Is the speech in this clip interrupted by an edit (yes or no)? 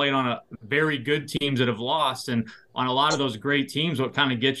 no